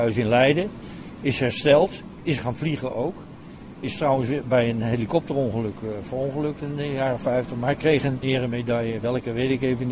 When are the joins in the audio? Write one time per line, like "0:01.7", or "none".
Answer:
0:02.4